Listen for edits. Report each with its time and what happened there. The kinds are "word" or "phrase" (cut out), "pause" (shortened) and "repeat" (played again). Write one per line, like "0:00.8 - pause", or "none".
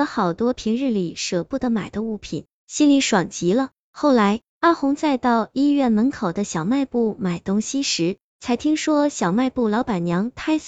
0:04.5 - pause